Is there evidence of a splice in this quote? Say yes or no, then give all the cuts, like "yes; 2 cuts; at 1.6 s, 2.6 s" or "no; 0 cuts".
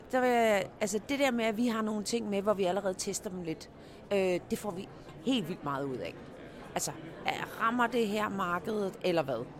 yes; 1 cut; at 1.1 s